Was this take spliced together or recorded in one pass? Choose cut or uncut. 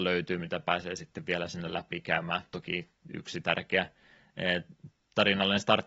uncut